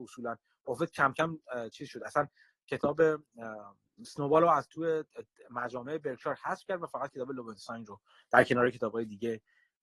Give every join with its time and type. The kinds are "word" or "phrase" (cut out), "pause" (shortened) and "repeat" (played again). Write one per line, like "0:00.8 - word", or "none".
none